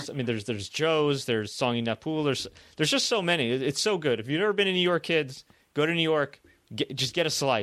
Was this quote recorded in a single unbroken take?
yes; 0 cuts

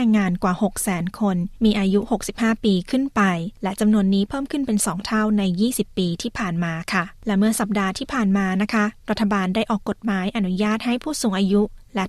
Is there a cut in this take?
no; 0 cuts

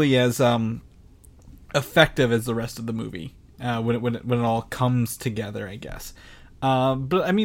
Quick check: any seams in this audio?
no; 0 cuts

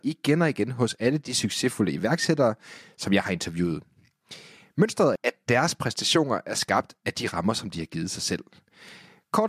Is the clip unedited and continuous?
no; 1 cut; at 5.2 s

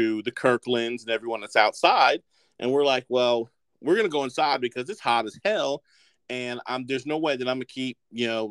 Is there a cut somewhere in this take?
no; 0 cuts

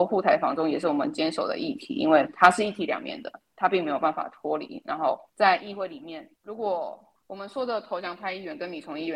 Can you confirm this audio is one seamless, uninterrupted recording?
no; 3 cuts; at 5.3 s, 6.4 s, 7.2 s

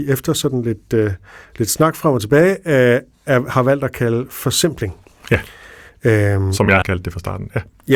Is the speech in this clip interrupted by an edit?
yes; 1 cut; at 6.8 s

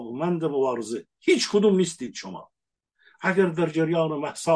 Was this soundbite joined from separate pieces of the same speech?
no; 0 cuts

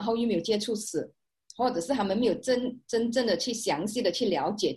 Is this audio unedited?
yes; 0 cuts

